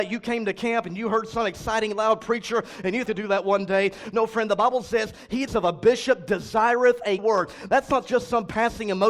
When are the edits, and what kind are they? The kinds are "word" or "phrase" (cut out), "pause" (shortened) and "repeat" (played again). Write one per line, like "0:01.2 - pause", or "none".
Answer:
0:03.1 - phrase
0:05.5 - phrase
0:07.2 - word